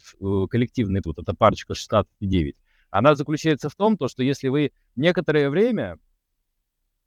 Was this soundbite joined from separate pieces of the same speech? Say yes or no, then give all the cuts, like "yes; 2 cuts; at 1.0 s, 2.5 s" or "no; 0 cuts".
yes; 1 cut; at 1.0 s